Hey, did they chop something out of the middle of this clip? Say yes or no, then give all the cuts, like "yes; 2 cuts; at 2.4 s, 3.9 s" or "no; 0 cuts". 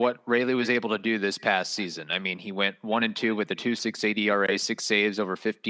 no; 0 cuts